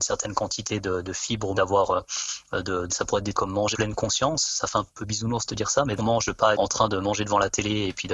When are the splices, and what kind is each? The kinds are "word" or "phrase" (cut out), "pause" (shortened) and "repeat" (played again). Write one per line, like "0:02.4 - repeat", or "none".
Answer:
0:01.5 - word
0:02.9 - word
0:03.3 - word
0:03.7 - word
0:04.9 - pause
0:06.0 - phrase
0:06.5 - word